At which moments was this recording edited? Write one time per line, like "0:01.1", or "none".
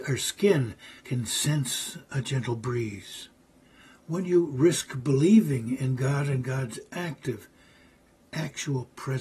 0:01.0
0:03.6

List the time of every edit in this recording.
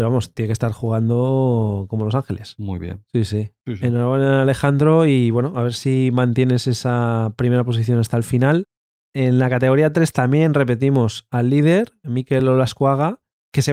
none

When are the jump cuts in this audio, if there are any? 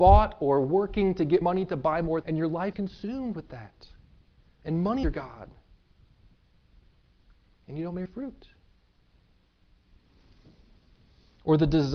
0:01.4
0:02.2
0:02.7
0:05.0
0:08.0

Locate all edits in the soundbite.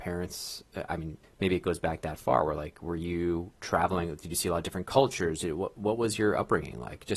0:01.2

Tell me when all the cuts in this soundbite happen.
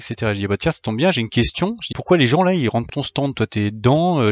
0:01.9
0:02.9

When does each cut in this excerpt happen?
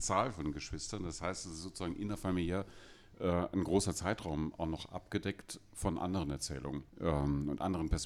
0:06.9

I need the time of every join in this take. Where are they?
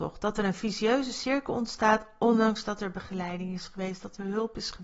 none

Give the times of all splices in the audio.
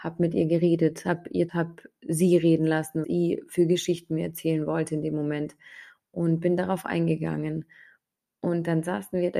0:01.5
0:03.0

